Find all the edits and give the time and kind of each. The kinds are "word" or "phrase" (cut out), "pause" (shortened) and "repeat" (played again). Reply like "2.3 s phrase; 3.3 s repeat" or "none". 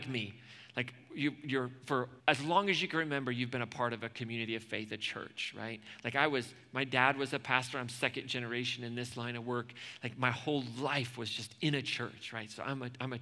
2.2 s pause